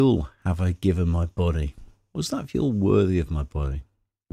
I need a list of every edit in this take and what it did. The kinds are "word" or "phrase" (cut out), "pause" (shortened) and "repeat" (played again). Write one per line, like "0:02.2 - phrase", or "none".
none